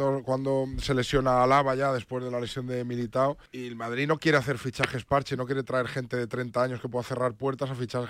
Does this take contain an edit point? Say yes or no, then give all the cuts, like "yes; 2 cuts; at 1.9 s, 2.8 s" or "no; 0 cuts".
yes; 1 cut; at 3.5 s